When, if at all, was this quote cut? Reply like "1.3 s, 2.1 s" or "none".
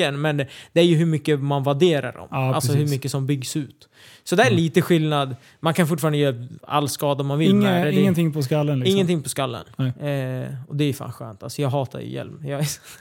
none